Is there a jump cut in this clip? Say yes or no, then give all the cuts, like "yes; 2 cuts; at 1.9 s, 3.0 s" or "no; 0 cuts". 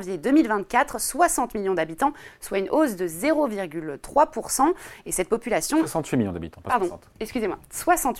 no; 0 cuts